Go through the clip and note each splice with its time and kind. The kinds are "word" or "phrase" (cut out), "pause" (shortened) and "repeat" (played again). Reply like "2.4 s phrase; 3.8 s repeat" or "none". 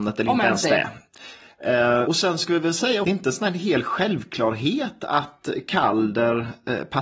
2.0 s word; 3.0 s phrase